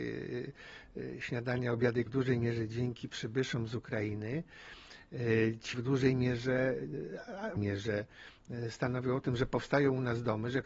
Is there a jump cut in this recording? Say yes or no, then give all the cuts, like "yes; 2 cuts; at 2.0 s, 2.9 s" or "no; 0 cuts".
yes; 3 cuts; at 2.1 s, 5.7 s, 7.6 s